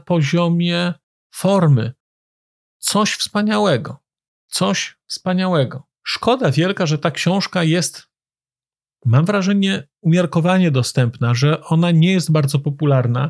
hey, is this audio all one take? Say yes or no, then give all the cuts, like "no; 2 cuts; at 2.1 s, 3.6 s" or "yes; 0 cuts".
no; 1 cut; at 5.9 s